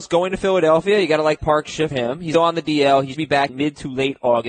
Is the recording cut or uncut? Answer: cut